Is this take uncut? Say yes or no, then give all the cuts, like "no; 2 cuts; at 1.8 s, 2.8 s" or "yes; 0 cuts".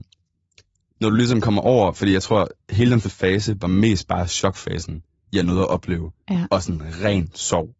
no; 1 cut; at 3.0 s